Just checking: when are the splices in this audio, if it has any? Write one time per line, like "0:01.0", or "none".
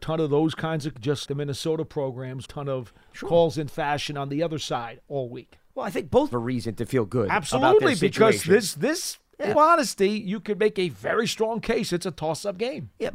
0:00.9
0:01.3
0:02.5
0:03.7
0:06.3
0:09.5